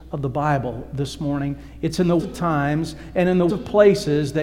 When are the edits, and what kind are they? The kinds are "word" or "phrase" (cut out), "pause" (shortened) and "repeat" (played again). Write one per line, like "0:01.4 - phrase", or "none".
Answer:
0:02.2 - word
0:03.5 - word